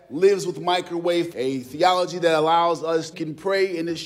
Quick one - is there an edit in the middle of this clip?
yes; 2 cuts; at 1.3 s, 3.1 s

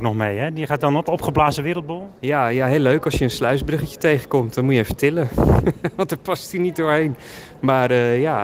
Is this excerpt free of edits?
no; 1 cut; at 2.2 s

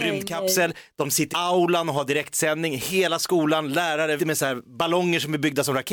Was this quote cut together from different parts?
yes; 2 cuts; at 1.3 s, 4.2 s

